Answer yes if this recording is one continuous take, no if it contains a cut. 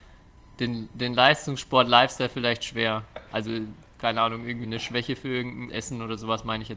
no